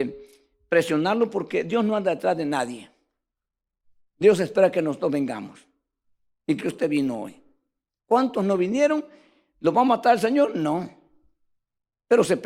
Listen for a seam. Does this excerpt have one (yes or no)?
yes